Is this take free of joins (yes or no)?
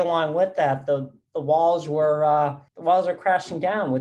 no